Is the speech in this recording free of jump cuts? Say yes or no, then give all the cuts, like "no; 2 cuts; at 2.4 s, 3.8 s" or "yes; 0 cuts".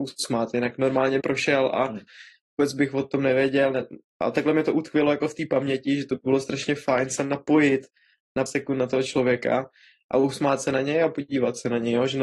no; 2 cuts; at 1.2 s, 8.5 s